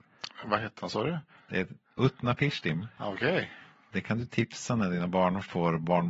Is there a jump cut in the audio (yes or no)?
no